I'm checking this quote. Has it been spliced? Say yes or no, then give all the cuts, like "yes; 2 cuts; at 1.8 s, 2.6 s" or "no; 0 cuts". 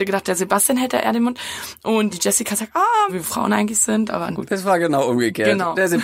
yes; 3 cuts; at 2.1 s, 3.1 s, 4.3 s